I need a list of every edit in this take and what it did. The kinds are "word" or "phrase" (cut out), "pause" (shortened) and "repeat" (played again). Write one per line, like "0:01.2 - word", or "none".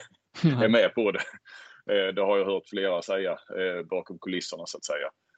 none